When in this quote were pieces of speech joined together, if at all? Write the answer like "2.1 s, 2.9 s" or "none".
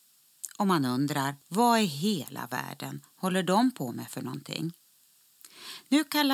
1.4 s